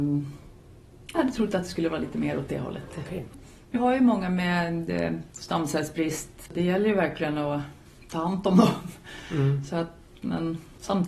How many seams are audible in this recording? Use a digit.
2